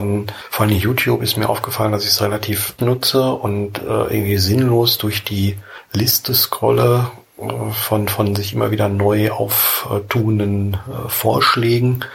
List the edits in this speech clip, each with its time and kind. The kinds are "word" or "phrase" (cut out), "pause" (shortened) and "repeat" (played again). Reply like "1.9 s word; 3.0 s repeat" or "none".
2.8 s word